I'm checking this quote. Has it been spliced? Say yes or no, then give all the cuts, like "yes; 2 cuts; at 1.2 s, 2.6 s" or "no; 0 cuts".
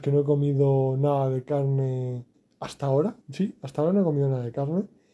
yes; 2 cuts; at 2.3 s, 3.2 s